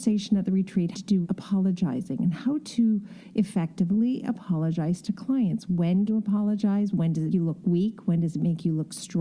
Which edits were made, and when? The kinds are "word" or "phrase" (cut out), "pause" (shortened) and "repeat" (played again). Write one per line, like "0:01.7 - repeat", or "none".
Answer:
0:00.9 - word
0:01.2 - word
0:06.1 - word
0:07.3 - word